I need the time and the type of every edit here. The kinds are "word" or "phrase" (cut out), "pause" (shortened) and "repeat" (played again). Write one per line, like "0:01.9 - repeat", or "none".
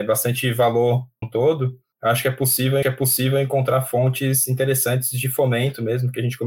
0:01.2 - phrase
0:02.8 - repeat